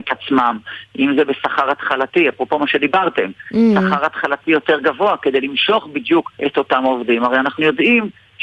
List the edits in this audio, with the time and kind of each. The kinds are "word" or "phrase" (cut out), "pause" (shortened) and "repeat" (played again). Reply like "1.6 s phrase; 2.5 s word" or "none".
6.4 s pause